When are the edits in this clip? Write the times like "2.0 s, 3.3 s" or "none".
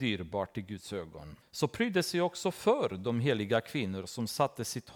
1.4 s